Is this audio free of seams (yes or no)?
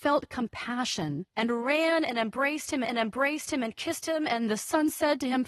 no